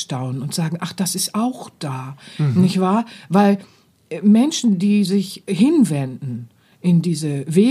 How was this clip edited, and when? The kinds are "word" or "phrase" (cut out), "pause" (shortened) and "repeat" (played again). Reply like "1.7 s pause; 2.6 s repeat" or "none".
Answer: none